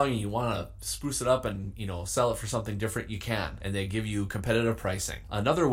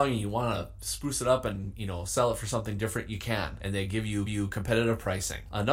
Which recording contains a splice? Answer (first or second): second